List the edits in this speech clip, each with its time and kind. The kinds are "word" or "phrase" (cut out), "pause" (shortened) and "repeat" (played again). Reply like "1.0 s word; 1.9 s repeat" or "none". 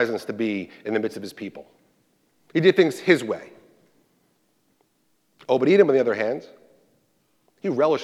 none

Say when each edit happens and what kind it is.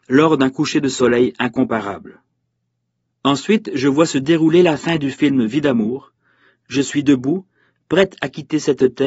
none

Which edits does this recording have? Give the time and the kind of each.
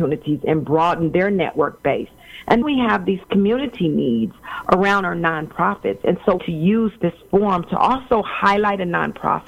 2.6 s word; 6.4 s phrase

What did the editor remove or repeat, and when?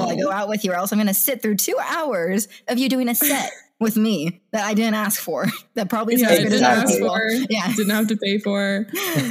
none

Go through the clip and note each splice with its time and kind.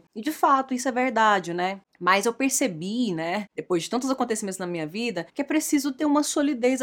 5.3 s pause

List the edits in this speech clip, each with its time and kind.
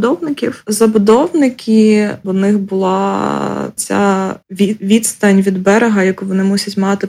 2.2 s phrase; 3.8 s word; 4.4 s pause

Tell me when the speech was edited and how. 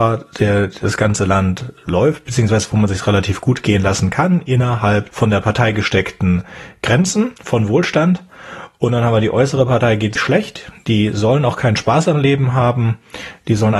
5.1 s word; 7.4 s pause; 10.2 s word

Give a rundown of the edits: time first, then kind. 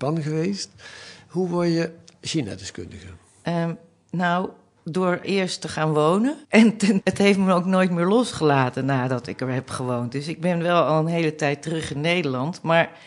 5.2 s word; 6.4 s pause; 7.0 s word

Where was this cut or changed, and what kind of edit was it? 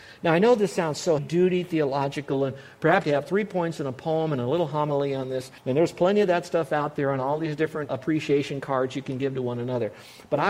1.2 s word; 3.0 s phrase; 5.6 s pause; 7.9 s word

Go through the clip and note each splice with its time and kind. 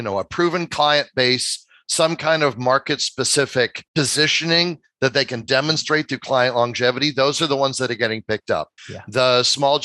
3.9 s pause; 8.8 s pause

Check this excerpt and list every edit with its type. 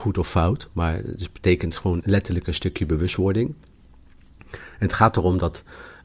2.0 s word

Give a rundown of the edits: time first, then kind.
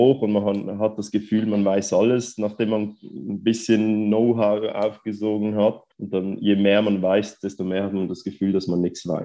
5.9 s pause

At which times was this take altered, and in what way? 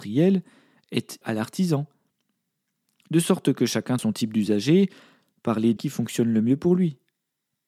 1.2 s word; 4.0 s word; 5.8 s word

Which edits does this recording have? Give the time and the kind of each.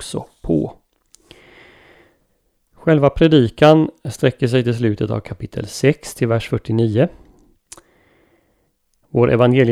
none

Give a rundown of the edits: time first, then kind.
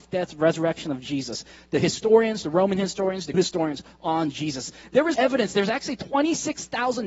3.3 s phrase; 5.1 s word

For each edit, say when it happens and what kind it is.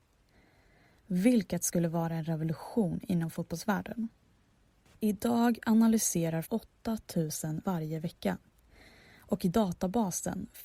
6.4 s phrase; 7.6 s word

